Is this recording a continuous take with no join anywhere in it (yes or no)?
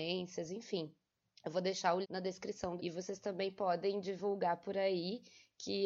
no